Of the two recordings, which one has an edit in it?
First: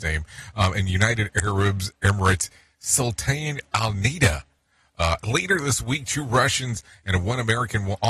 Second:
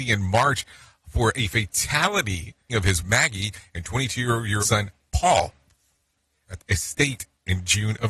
second; 4 cuts; at 2.7 s, 3.0 s, 4.6 s, 6.6 s

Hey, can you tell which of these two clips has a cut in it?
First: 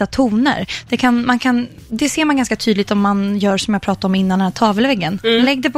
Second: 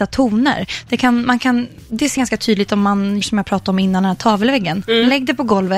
second; 2 cuts; at 2.2 s, 3.2 s

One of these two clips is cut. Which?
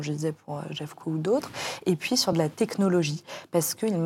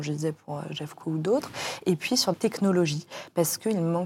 second; 1 cut; at 2.3 s

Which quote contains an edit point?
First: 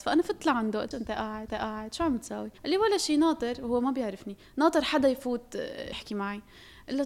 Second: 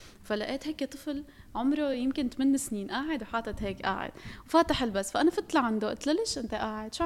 first; 4 cuts; at 0.9 s, 1.5 s, 2.6 s, 5.9 s

